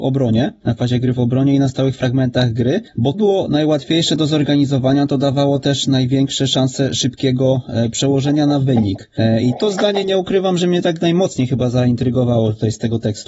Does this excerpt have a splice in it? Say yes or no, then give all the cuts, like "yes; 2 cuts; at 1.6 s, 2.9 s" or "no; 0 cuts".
yes; 2 cuts; at 3.1 s, 9.6 s